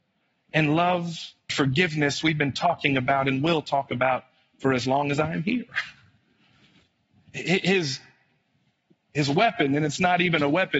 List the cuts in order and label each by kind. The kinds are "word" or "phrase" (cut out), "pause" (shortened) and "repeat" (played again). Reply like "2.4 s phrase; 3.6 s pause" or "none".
1.5 s word